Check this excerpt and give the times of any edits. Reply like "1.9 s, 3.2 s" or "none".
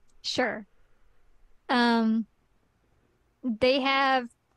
none